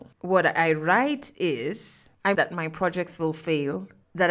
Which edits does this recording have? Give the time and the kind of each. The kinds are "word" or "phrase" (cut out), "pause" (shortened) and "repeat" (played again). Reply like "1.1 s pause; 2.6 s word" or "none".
2.3 s word

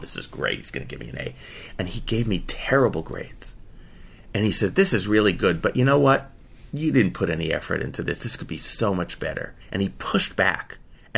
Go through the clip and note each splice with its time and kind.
9.6 s pause

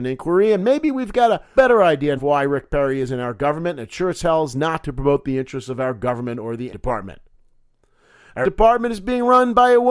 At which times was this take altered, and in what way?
1.6 s word; 2.2 s word; 6.7 s word; 8.4 s word

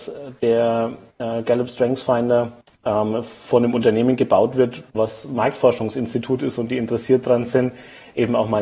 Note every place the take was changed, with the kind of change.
2.6 s pause

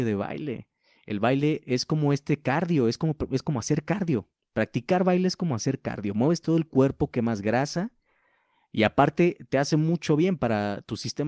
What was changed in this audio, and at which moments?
none

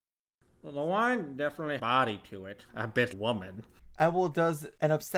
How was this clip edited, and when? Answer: 1.8 s phrase; 2.7 s word; 3.1 s phrase

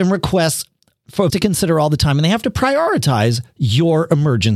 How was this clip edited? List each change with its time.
1.3 s word

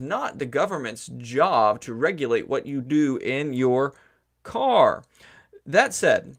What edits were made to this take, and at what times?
none

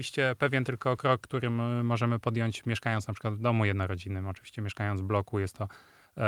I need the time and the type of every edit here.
none

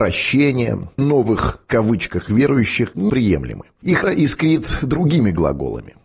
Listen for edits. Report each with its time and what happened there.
1.0 s word; 1.7 s word; 3.1 s word; 4.0 s word

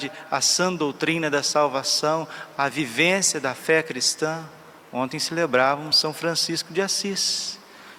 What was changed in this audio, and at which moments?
none

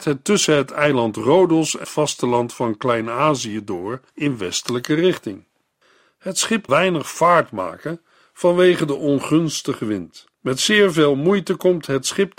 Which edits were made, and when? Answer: 1.8 s word; 4.1 s pause; 6.7 s word; 10.3 s pause

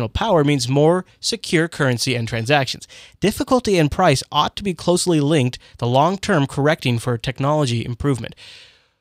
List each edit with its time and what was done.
none

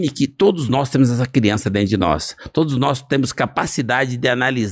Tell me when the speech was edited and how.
none

